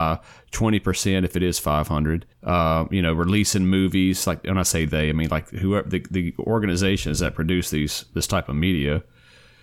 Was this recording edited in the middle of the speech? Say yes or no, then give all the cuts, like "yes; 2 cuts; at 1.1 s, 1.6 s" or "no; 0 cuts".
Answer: yes; 1 cut; at 2.3 s